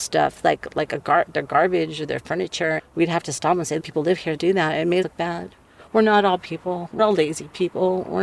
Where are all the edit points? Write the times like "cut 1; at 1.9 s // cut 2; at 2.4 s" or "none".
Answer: cut 1; at 1.2 s // cut 2; at 2.8 s // cut 3; at 3.8 s // cut 4; at 4.4 s // cut 5; at 5.0 s // cut 6; at 6.4 s // cut 7; at 7.0 s